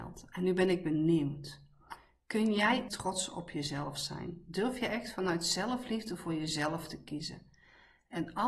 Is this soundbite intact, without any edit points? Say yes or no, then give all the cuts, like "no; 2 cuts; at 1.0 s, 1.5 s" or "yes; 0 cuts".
no; 1 cut; at 2.9 s